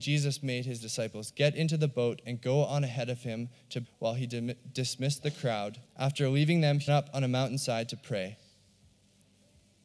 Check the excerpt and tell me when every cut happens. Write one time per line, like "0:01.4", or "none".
0:03.8
0:05.8
0:06.9